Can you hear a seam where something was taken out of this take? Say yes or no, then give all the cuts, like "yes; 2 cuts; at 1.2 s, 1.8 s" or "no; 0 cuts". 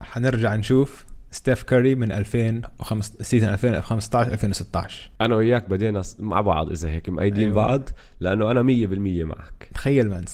yes; 2 cuts; at 1.3 s, 5.1 s